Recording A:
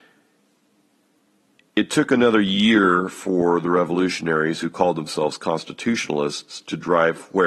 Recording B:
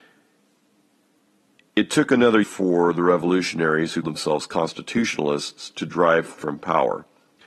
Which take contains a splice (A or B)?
B